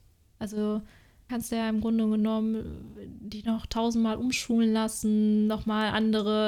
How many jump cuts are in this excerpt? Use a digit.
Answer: 1